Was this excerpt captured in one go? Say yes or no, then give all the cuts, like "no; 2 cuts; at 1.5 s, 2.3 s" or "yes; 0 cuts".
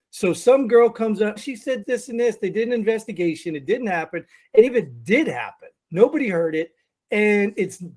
no; 4 cuts; at 1.4 s, 1.8 s, 4.7 s, 5.8 s